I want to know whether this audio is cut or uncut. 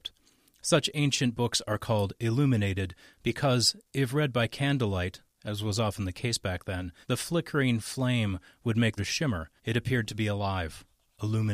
cut